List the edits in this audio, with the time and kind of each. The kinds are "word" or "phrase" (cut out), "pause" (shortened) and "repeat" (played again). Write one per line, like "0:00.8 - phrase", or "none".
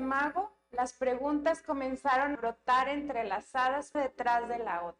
0:02.3 - word
0:03.9 - word